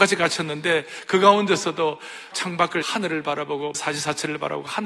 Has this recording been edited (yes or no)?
yes